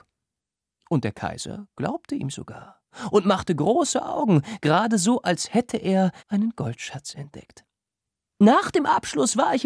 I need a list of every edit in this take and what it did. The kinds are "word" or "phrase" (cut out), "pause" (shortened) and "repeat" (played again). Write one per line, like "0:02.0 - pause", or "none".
0:06.2 - pause